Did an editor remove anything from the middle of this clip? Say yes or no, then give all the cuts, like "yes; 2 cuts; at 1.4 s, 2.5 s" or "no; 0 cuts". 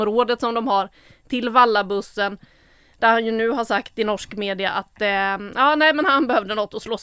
no; 0 cuts